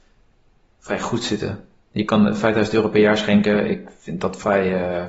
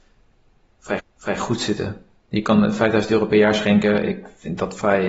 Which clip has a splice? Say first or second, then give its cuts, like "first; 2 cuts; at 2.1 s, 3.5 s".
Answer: second; 1 cut; at 1.0 s